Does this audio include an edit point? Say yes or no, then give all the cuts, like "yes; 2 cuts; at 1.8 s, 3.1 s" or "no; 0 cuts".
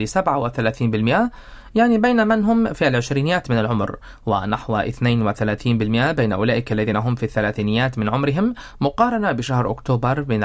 no; 0 cuts